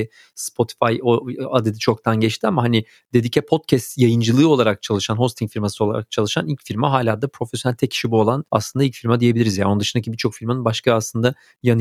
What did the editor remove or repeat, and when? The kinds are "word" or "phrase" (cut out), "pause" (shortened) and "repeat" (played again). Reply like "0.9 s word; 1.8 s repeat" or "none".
8.5 s pause